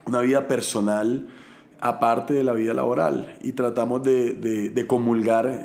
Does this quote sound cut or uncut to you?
uncut